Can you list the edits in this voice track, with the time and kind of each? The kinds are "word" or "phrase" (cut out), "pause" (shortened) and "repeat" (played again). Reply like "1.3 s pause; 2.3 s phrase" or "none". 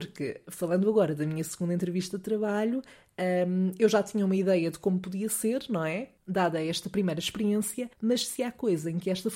7.9 s pause